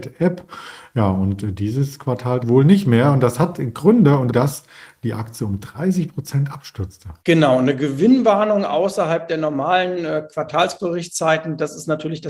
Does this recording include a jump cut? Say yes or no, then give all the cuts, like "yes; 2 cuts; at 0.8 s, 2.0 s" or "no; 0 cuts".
yes; 3 cuts; at 2.4 s, 4.3 s, 7.2 s